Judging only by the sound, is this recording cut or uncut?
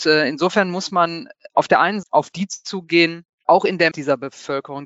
cut